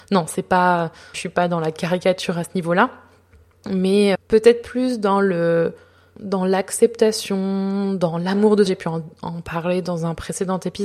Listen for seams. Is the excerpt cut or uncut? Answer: cut